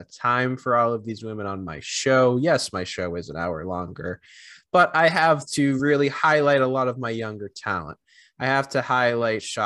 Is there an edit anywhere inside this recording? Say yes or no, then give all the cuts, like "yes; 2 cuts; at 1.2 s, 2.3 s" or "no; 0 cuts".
no; 0 cuts